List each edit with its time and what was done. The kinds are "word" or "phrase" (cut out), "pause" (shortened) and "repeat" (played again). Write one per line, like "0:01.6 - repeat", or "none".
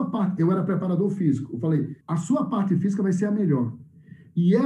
0:02.0 - pause